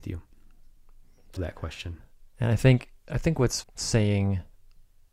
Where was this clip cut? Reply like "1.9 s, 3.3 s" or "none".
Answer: 1.4 s, 3.6 s